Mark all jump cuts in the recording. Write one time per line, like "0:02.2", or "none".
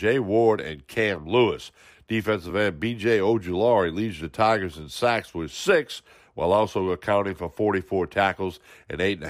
none